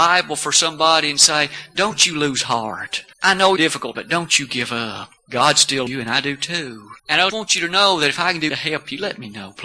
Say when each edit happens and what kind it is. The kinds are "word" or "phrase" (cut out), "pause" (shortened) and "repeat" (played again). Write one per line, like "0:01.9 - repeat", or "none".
0:03.1 - pause
0:03.6 - phrase
0:03.9 - word
0:05.2 - pause
0:05.9 - word
0:07.0 - pause
0:07.3 - word
0:08.5 - word